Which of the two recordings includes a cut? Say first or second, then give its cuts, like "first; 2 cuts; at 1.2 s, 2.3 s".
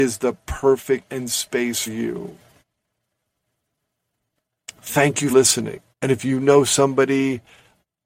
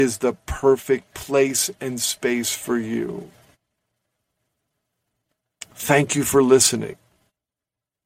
first; 4 cuts; at 1.1 s, 1.9 s, 5.3 s, 5.9 s